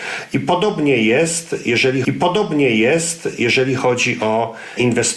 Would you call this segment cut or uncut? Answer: cut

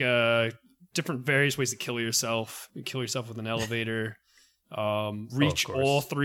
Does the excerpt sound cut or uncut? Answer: uncut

